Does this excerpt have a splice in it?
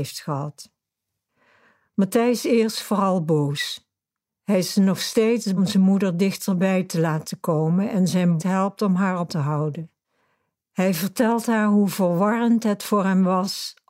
yes; 4 cuts; at 2.4 s, 5.6 s, 8.4 s, 9.3 s

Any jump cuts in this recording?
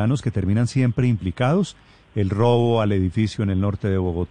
no; 0 cuts

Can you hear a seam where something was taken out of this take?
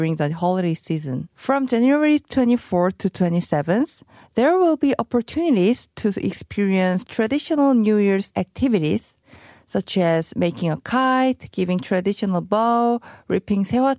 yes; 2 cuts; at 1.3 s, 8.3 s

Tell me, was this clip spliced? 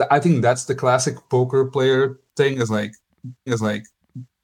yes; 1 cut; at 3.5 s

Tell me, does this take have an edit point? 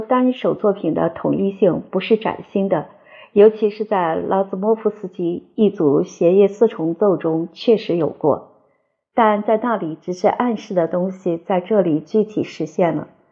no; 0 cuts

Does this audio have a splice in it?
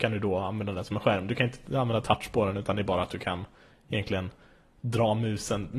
no; 0 cuts

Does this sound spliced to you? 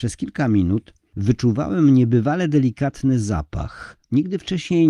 no; 0 cuts

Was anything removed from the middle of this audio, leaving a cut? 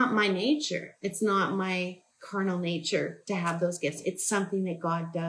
no; 0 cuts

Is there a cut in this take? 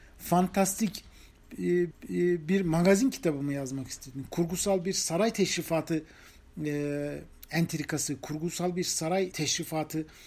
yes; 2 cuts; at 1.9 s, 9.3 s

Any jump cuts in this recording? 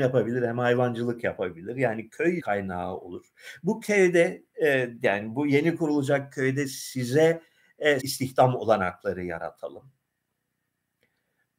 yes; 2 cuts; at 2.4 s, 8.0 s

